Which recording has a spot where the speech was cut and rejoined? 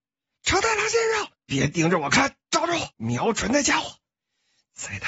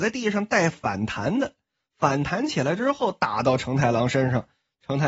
first; 3 cuts; at 1.3 s, 2.4 s, 2.9 s

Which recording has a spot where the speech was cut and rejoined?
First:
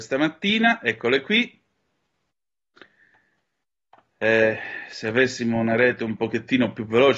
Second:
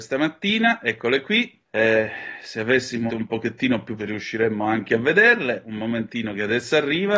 second; 3 cuts; at 1.6 s, 3.1 s, 4.0 s

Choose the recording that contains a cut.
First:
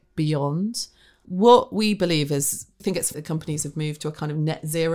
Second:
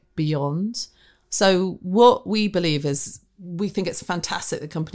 first; 3 cuts; at 1.2 s, 2.8 s, 3.1 s

